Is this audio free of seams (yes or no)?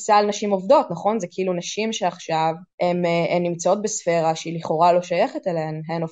no